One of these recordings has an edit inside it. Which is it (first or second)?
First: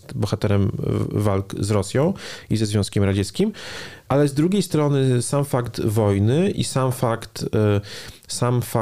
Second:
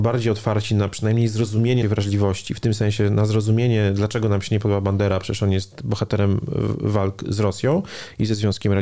second